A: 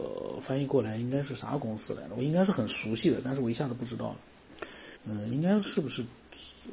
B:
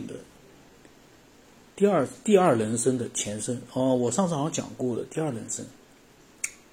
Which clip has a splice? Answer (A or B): A